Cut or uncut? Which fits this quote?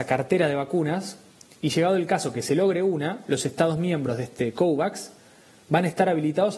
uncut